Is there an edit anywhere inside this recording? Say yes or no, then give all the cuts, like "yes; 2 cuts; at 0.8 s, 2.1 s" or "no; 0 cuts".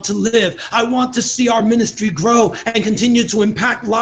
no; 0 cuts